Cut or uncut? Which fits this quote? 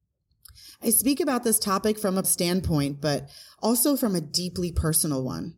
cut